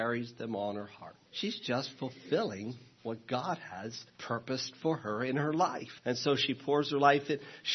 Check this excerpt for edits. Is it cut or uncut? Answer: cut